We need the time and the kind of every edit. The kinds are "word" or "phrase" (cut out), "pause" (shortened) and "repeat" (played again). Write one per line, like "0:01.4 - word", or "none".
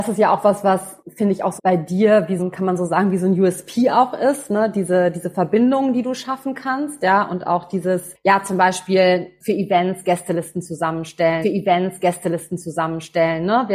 0:01.6 - word
0:02.4 - word
0:11.4 - repeat